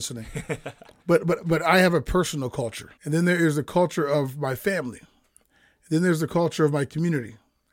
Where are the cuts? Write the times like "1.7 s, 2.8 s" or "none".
1.0 s, 3.0 s